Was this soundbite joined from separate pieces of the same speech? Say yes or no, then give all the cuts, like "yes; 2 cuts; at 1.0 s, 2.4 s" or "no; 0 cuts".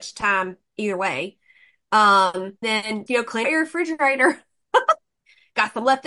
yes; 3 cuts; at 2.6 s, 3.1 s, 3.4 s